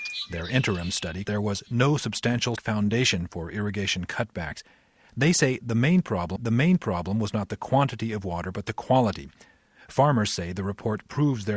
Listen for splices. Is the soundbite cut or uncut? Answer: cut